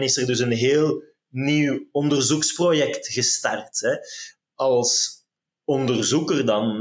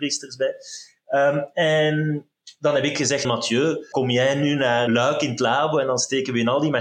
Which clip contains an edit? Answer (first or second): second